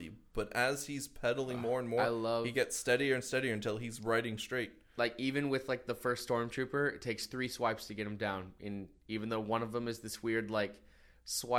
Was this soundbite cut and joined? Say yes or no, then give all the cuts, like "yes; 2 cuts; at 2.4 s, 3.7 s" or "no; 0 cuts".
no; 0 cuts